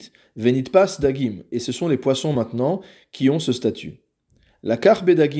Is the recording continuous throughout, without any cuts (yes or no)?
yes